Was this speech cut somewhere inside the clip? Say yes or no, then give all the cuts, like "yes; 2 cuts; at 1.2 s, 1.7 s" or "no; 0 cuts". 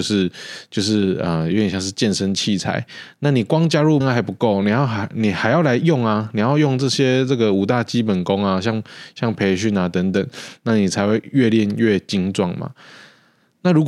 yes; 1 cut; at 4.0 s